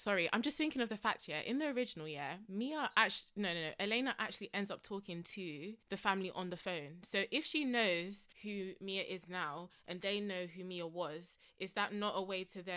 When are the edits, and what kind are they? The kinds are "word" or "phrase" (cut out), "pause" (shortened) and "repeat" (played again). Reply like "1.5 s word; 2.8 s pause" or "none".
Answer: 5.8 s pause; 8.3 s pause